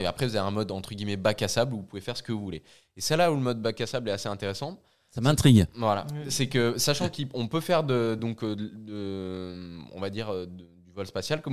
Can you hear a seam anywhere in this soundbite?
no; 0 cuts

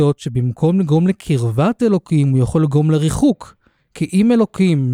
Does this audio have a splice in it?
no; 0 cuts

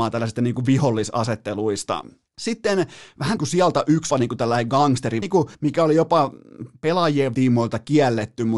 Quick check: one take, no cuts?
no; 6 cuts; at 2.3 s, 3.4 s, 4.1 s, 5.2 s, 5.5 s, 7.3 s

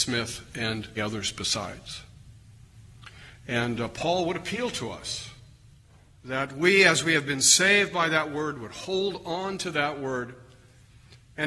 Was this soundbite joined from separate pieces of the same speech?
yes; 1 cut; at 1.0 s

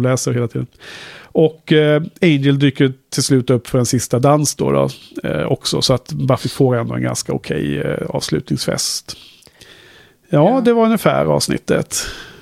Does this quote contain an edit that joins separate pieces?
no; 0 cuts

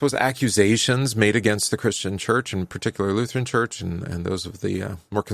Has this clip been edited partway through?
no; 0 cuts

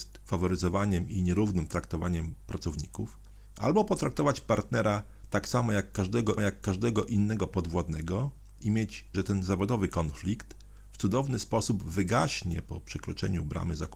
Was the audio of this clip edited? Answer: yes; 2 cuts; at 6.4 s, 9.1 s

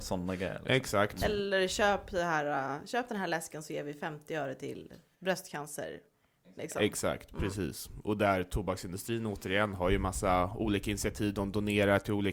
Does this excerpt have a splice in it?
no; 0 cuts

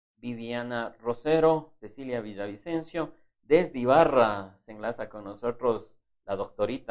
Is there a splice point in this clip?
no; 0 cuts

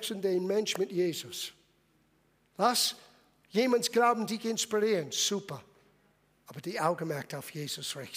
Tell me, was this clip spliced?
no; 0 cuts

